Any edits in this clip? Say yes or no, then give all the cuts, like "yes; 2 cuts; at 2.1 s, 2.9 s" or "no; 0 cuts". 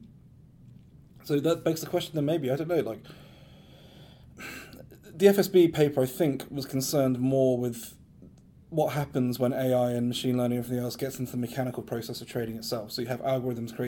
no; 0 cuts